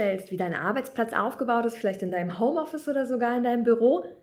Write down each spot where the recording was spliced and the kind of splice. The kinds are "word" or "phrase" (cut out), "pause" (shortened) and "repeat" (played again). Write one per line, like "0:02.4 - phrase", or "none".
none